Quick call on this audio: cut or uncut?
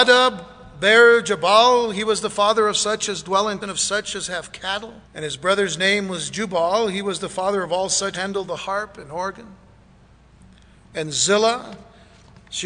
cut